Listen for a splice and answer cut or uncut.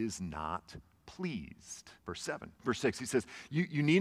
cut